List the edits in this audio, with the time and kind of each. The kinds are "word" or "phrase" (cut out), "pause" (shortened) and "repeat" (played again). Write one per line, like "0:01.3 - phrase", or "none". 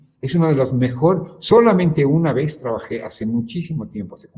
none